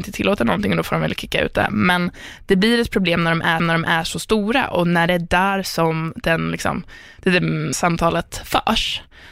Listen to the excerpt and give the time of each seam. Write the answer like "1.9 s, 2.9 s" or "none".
3.6 s, 7.7 s